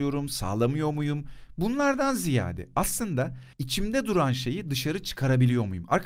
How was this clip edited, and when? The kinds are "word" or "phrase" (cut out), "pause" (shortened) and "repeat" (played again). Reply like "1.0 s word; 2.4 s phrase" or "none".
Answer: 3.5 s pause